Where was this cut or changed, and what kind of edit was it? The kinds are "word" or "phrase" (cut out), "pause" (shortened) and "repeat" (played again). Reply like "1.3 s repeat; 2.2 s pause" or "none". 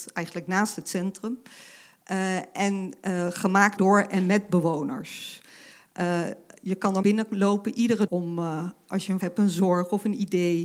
3.8 s word; 7.0 s word; 8.1 s word; 9.2 s word